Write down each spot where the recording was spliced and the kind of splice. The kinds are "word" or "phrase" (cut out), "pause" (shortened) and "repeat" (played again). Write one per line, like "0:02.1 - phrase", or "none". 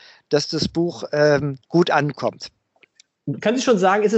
0:01.6 - pause